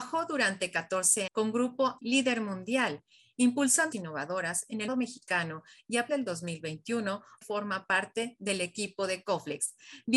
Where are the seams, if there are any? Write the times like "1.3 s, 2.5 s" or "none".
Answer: 1.3 s, 2.0 s, 3.9 s, 4.9 s, 6.1 s, 7.4 s

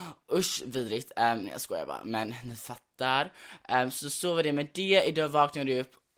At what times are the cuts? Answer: none

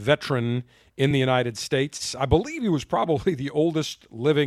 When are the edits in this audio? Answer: none

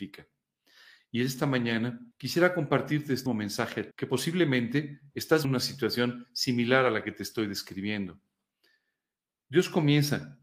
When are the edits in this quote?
2.1 s, 3.3 s, 3.9 s, 5.4 s

